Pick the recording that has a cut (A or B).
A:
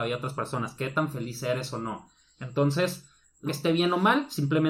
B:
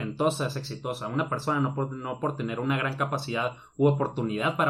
A